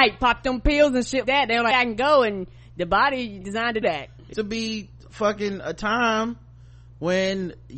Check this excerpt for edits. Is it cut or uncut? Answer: cut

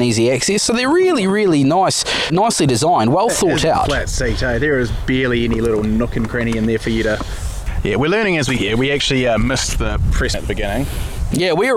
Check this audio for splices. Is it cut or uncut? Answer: cut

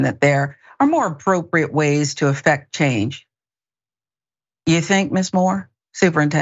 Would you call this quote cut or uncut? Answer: uncut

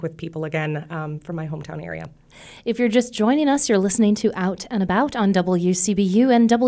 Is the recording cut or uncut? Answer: uncut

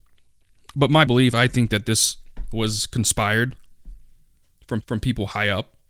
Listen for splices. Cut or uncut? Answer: cut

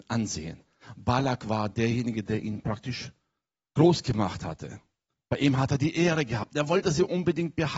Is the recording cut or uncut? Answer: uncut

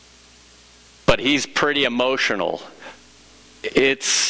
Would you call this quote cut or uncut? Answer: uncut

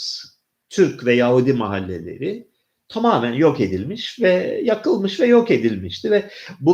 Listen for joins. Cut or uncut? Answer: uncut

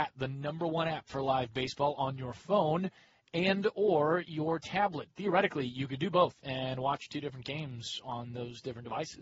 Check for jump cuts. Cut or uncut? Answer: uncut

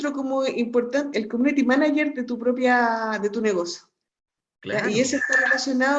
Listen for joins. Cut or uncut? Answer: cut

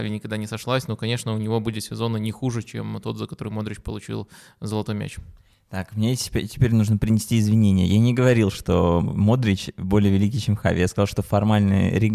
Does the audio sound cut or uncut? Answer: uncut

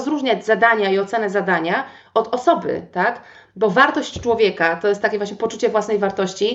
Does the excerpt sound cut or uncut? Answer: uncut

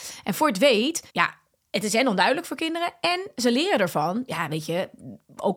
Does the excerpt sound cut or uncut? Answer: cut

